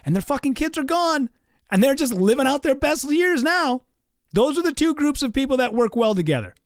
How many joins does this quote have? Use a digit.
0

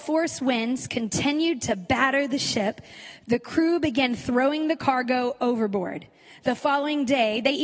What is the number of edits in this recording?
0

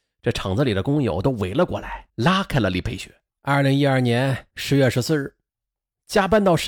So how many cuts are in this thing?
3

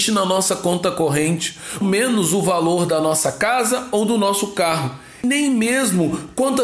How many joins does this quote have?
1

